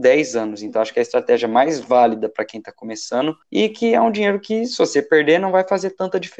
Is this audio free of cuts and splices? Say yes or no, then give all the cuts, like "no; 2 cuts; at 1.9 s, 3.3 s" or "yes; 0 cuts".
no; 1 cut; at 3.4 s